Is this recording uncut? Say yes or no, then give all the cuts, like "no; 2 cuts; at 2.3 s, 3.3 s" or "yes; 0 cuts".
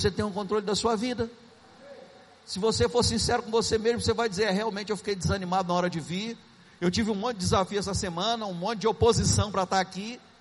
yes; 0 cuts